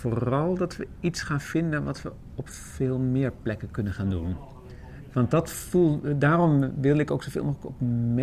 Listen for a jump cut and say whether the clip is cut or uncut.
uncut